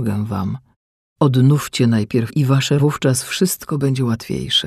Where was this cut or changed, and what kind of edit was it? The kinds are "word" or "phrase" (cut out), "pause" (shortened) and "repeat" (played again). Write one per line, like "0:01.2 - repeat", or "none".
0:02.3 - word
0:02.8 - phrase